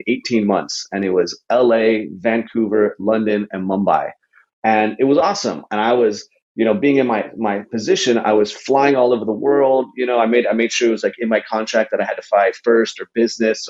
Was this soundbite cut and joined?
no; 0 cuts

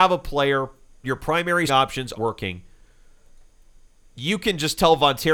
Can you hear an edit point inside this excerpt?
yes; 3 cuts; at 1.0 s, 1.7 s, 2.1 s

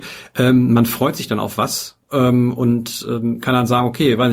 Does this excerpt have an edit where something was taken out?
no; 0 cuts

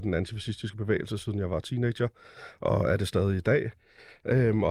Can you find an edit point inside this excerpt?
no; 0 cuts

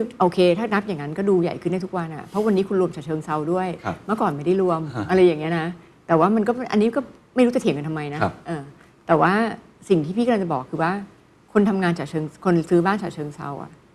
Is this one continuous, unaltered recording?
yes; 0 cuts

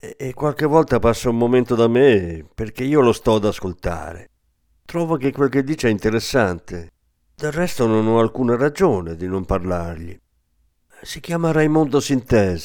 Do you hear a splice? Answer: no; 0 cuts

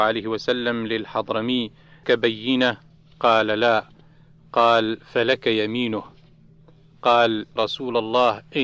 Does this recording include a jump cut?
yes; 2 cuts; at 2.0 s, 7.6 s

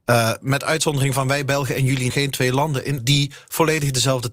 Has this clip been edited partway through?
yes; 2 cuts; at 2.1 s, 3.0 s

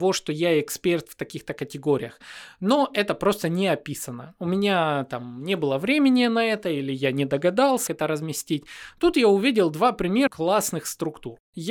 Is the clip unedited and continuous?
no; 2 cuts; at 7.9 s, 10.3 s

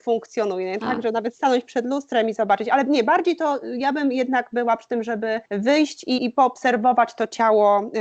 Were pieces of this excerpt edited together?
yes; 2 cuts; at 5.5 s, 6.2 s

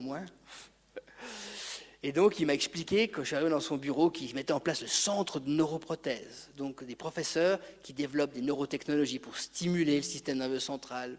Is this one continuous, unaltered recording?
yes; 0 cuts

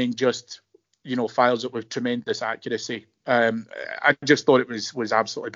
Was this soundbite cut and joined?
no; 0 cuts

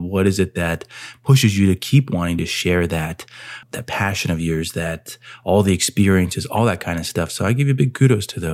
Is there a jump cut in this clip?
yes; 1 cut; at 3.6 s

